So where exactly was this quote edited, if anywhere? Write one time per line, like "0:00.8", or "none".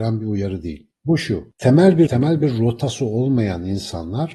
0:02.1